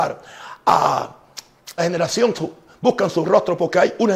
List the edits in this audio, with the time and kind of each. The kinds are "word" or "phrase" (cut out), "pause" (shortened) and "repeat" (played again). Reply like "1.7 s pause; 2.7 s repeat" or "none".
1.8 s word; 2.3 s word